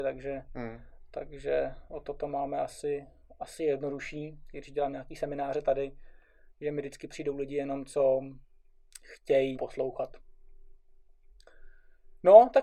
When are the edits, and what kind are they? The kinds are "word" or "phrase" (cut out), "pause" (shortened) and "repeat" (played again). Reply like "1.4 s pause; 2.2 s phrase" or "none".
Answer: 9.6 s word

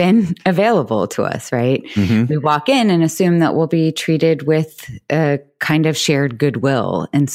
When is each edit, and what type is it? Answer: none

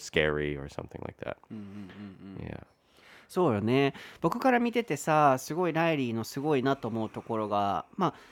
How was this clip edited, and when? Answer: none

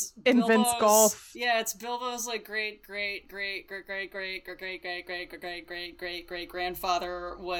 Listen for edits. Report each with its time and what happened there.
none

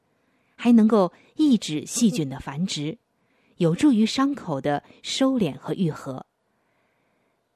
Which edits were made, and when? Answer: none

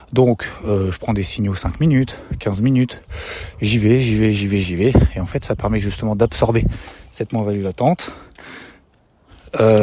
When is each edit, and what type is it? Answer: none

